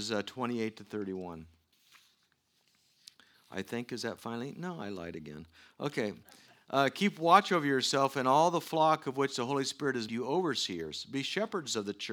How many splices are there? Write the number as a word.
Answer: one